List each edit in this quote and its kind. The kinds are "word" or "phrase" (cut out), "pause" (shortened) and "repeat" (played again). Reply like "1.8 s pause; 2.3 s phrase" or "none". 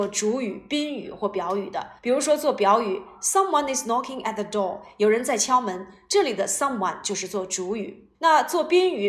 2.0 s pause; 8.1 s pause